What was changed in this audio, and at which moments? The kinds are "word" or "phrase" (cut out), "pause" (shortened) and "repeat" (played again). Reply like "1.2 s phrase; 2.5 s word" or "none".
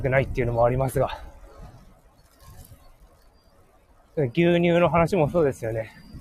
none